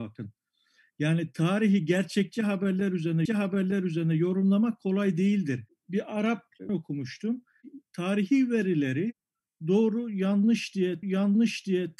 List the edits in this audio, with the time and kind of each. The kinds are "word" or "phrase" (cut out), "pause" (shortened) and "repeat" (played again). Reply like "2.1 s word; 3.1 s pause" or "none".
3.3 s repeat; 6.7 s word; 11.0 s repeat